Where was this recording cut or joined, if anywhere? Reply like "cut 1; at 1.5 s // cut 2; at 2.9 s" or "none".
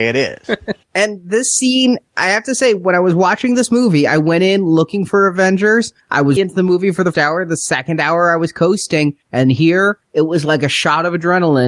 cut 1; at 6.4 s // cut 2; at 7.1 s